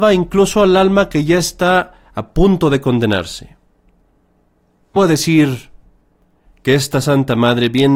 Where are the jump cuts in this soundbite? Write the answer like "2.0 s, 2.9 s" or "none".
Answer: 5.0 s